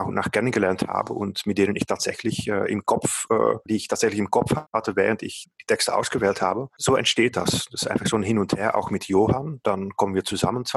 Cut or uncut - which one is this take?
cut